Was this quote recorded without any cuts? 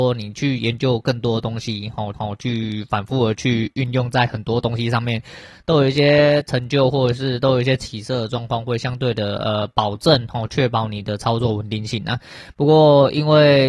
no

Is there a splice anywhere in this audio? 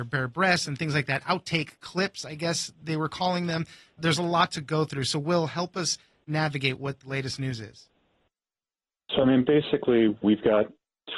no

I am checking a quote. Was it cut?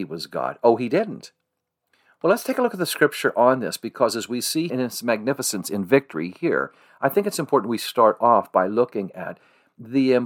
yes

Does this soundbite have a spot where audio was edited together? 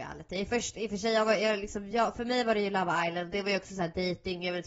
no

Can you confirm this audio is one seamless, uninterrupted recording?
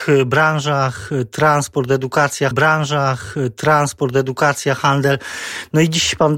no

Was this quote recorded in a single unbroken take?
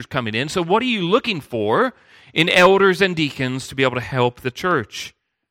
yes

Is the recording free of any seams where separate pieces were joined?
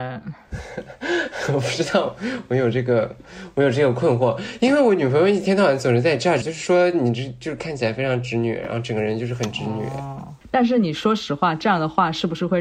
no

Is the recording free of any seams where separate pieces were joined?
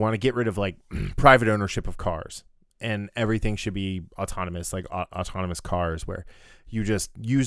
yes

